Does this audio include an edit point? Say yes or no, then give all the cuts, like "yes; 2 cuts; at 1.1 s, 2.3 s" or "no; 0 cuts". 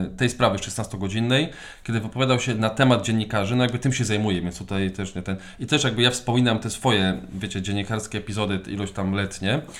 no; 0 cuts